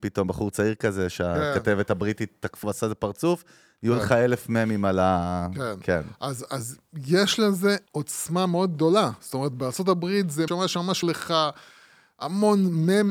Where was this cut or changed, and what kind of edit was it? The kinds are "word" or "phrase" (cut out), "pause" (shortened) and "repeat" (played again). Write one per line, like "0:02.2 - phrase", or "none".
0:02.6 - word
0:07.9 - pause
0:10.5 - word
0:11.0 - word